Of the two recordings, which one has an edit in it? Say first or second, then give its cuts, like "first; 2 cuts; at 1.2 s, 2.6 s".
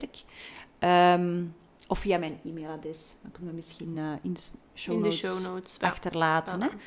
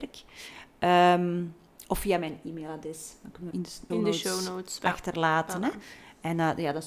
second; 2 cuts; at 3.5 s, 3.9 s